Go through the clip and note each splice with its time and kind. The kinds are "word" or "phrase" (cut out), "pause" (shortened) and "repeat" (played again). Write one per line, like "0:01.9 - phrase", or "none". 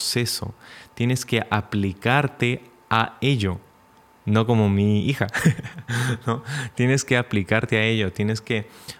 none